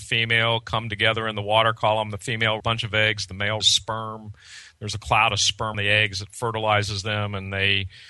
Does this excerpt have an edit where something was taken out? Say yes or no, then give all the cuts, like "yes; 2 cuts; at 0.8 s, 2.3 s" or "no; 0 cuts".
yes; 3 cuts; at 2.6 s, 3.6 s, 5.7 s